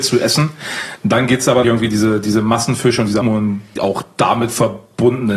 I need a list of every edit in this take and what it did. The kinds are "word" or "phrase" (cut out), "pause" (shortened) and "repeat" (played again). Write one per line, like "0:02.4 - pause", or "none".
0:01.6 - word
0:03.2 - word
0:03.8 - word